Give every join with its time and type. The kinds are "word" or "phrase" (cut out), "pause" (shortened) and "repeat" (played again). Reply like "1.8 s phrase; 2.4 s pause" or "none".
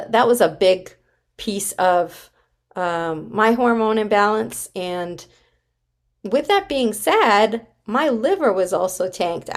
none